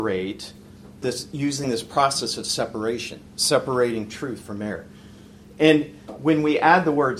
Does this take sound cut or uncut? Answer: uncut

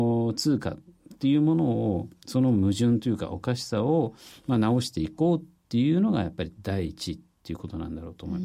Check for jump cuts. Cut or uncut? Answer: uncut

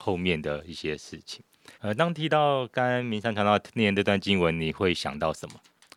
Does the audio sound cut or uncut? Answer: cut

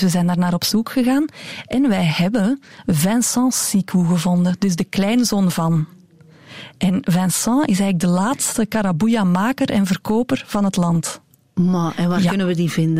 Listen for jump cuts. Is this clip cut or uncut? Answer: uncut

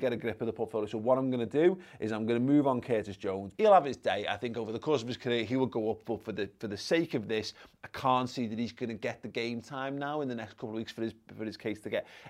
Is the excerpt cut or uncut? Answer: cut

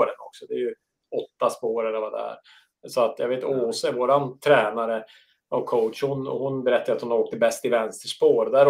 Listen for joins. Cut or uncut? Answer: uncut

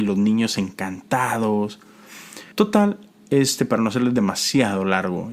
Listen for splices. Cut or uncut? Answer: cut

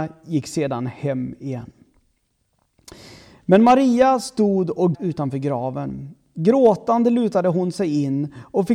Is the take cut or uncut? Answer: cut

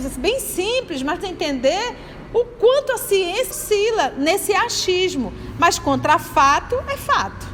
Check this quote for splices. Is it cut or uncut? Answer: cut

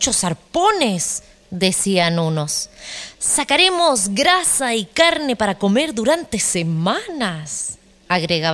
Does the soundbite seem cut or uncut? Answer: uncut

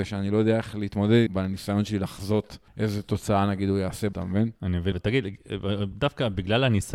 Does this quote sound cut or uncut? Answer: cut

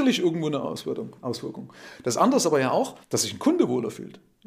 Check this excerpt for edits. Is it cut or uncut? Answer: cut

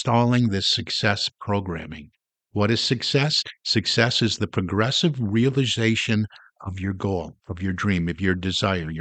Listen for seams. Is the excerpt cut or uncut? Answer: uncut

